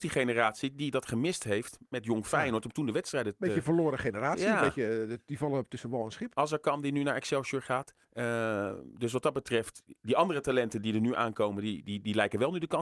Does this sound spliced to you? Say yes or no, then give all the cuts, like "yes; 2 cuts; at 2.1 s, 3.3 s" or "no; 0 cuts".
yes; 3 cuts; at 1.9 s, 8.0 s, 11.8 s